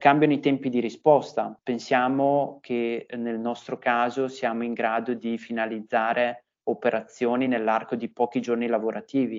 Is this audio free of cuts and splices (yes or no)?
yes